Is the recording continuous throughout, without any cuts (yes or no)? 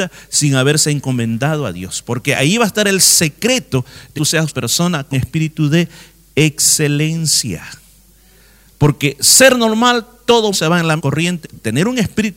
no